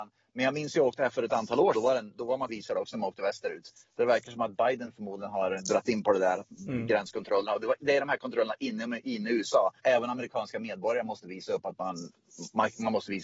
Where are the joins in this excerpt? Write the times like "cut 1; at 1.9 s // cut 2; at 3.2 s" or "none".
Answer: cut 1; at 1.7 s // cut 2; at 2.5 s // cut 3; at 9.8 s